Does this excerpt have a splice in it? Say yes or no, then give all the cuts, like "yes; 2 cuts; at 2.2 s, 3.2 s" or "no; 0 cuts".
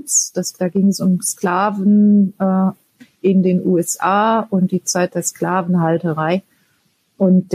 no; 0 cuts